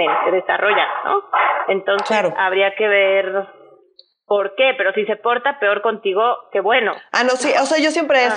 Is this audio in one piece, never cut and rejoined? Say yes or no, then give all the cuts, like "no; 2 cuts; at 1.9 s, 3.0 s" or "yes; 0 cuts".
yes; 0 cuts